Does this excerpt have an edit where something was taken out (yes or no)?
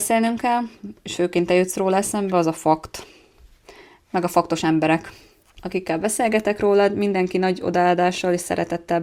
no